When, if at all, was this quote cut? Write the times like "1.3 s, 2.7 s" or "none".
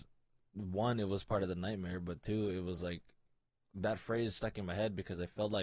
none